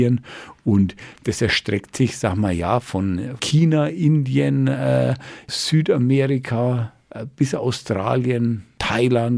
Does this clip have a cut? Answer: no; 0 cuts

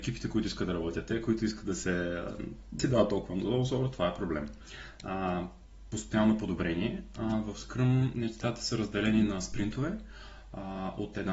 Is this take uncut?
no; 1 cut; at 2.8 s

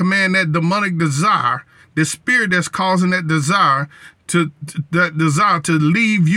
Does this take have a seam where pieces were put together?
no; 0 cuts

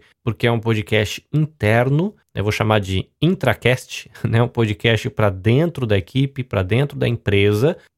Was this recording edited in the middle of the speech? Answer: no; 0 cuts

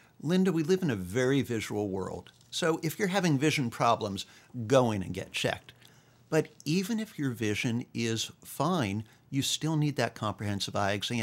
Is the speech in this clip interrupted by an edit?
no; 0 cuts

